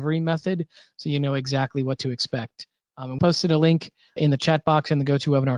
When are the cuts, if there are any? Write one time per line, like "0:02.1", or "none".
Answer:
0:03.2
0:04.2

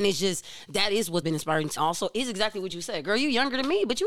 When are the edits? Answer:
0:01.2
0:01.8

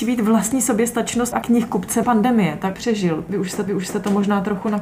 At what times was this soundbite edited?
0:01.3
0:02.0
0:02.7
0:03.7

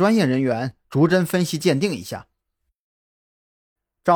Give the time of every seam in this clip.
none

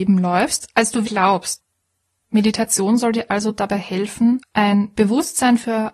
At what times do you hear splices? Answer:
0:01.0

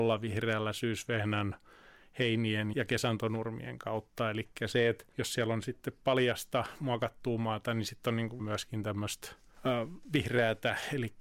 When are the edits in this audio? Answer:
0:02.7
0:08.4

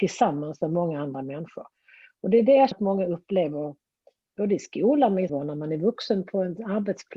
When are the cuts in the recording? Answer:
0:02.7
0:05.3

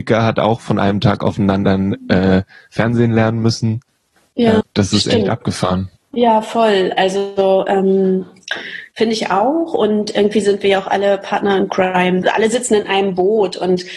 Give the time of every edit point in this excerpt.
0:04.6

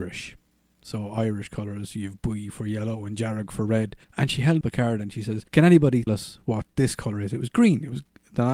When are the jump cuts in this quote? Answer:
0:04.0
0:04.6
0:05.5
0:06.1

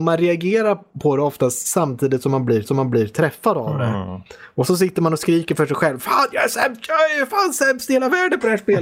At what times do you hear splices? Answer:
0:02.6

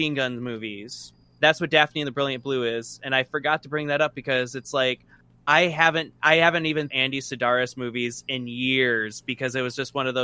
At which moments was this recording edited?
0:01.4
0:06.2
0:06.9

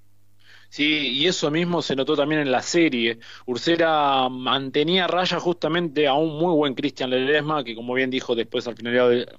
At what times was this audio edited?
none

